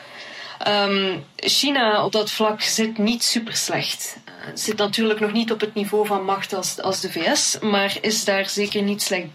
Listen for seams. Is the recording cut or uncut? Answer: uncut